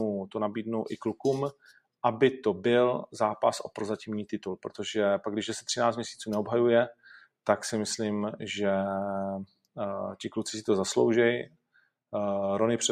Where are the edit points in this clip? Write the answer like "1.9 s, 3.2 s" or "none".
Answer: none